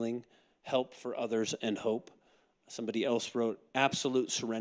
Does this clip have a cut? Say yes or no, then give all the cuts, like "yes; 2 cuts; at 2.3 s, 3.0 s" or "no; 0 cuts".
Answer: no; 0 cuts